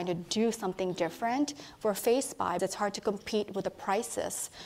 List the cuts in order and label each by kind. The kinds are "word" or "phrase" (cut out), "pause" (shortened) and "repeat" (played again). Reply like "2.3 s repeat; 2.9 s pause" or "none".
2.6 s word